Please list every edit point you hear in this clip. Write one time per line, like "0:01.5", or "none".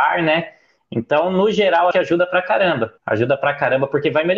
0:01.9
0:03.0